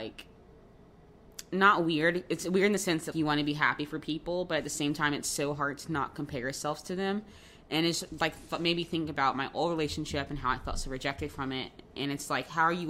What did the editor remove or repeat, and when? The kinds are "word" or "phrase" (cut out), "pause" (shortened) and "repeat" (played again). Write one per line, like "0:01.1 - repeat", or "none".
0:03.1 - word